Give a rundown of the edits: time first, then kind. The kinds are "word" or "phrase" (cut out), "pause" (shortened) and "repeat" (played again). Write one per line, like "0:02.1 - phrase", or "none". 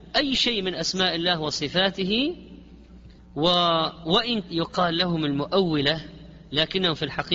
0:03.2 - pause
0:04.4 - word